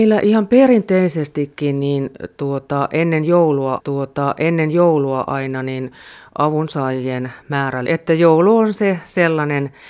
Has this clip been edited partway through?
yes; 2 cuts; at 3.8 s, 7.9 s

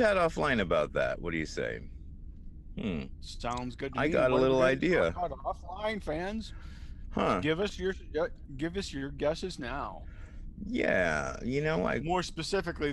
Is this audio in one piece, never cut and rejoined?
yes; 0 cuts

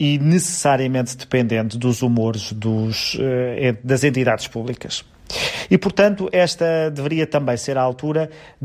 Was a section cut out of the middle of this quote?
no; 0 cuts

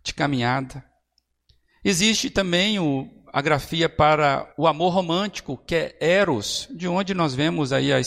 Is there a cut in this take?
yes; 1 cut; at 4.5 s

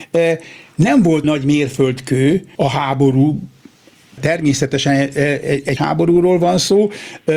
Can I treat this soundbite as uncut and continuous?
no; 4 cuts; at 1.2 s, 2.5 s, 4.2 s, 5.8 s

